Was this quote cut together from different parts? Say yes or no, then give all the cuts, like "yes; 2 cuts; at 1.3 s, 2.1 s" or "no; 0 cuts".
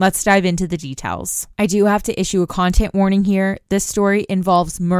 yes; 1 cut; at 1.5 s